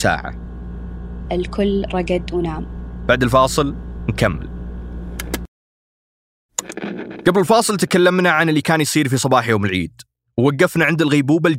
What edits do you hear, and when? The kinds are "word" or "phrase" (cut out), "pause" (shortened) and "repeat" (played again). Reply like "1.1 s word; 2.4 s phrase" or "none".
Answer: 1.2 s word